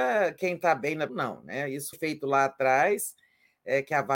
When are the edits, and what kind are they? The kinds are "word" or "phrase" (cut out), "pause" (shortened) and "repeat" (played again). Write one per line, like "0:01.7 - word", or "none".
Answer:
0:01.1 - phrase
0:01.9 - word